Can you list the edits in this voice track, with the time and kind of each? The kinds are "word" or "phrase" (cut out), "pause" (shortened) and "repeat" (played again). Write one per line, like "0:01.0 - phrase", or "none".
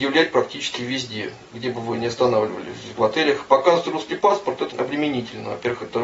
0:03.0 - word
0:04.7 - word